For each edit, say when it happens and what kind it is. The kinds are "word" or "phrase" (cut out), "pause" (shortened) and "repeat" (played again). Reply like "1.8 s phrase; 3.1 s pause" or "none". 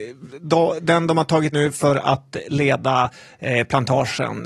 1.5 s word

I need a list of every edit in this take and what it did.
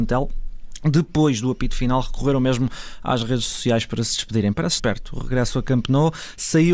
4.8 s phrase

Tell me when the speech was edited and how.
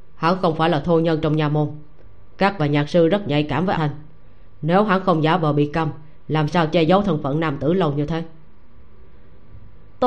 2.6 s phrase; 3.7 s word

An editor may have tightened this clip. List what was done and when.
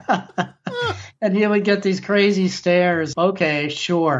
3.1 s word

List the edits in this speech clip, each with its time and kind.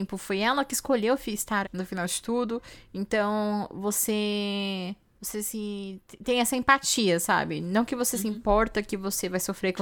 1.6 s word

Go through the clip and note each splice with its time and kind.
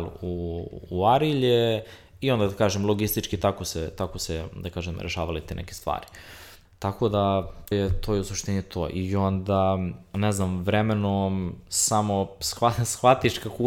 7.7 s word

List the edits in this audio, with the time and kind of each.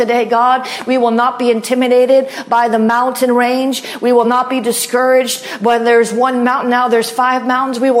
none

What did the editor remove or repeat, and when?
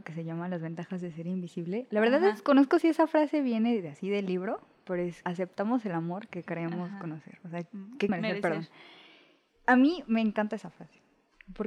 5.2 s word; 8.1 s word

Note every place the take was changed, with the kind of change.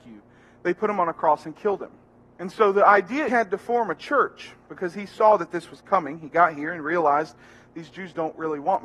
2.1 s pause; 3.3 s phrase

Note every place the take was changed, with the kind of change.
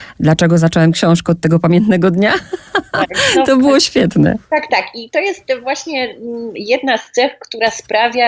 4.4 s pause

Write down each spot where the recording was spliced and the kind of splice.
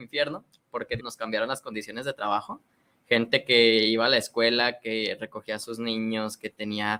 1.0 s phrase

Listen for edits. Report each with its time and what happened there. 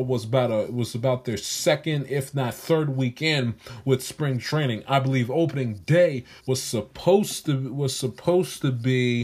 6.4 s pause

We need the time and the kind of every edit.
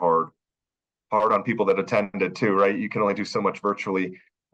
none

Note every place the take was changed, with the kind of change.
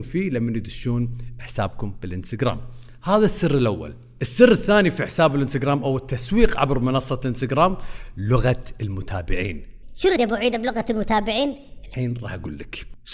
10.2 s word

